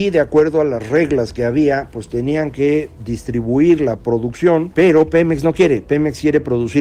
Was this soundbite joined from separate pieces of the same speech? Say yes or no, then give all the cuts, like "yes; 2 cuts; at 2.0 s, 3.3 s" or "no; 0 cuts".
no; 0 cuts